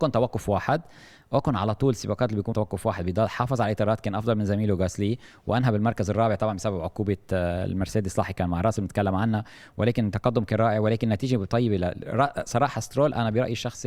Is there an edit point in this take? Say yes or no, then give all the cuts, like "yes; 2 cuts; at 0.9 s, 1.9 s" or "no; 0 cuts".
yes; 1 cut; at 2.5 s